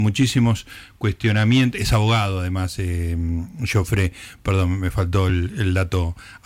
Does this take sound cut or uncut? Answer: uncut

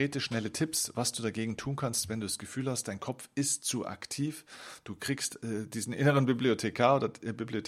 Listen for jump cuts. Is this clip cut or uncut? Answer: uncut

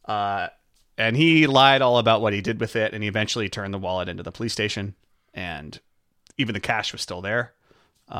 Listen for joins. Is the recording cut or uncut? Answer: uncut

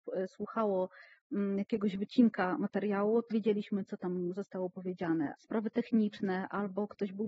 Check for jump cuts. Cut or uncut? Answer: cut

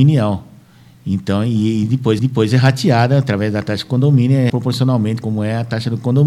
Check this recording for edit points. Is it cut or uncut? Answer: cut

